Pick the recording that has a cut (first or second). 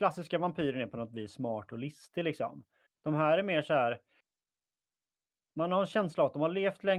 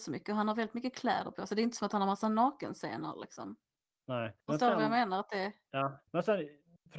second